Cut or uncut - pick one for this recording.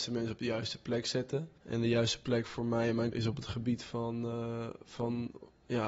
cut